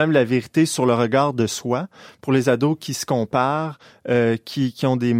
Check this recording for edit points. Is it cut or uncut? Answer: uncut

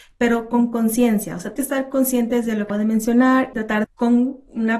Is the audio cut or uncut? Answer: cut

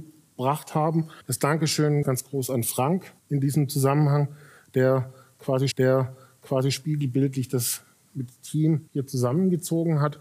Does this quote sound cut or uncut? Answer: cut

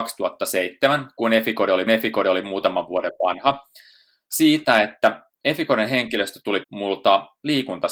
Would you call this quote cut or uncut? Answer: cut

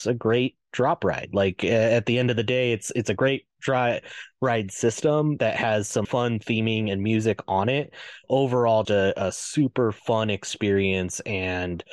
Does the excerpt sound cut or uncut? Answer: cut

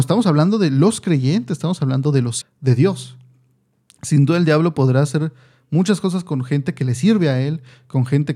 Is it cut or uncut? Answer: cut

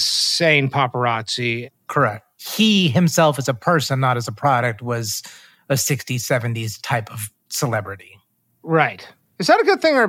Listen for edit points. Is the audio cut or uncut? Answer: uncut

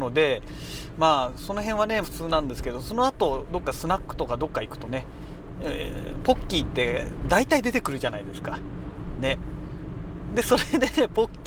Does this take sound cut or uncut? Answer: cut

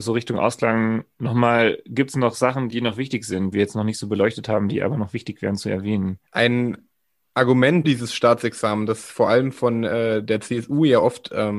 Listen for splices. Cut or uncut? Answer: cut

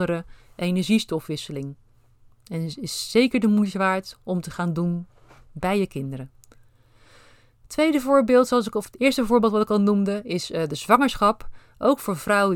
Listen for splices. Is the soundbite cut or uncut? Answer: uncut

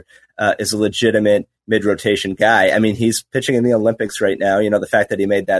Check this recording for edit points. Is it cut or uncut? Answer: uncut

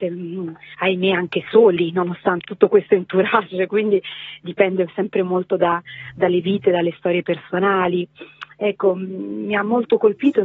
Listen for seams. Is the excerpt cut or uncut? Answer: cut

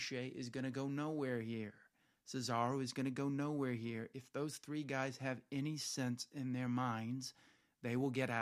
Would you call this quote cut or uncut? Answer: uncut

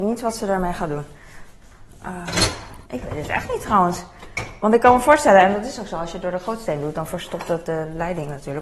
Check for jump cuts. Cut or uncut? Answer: cut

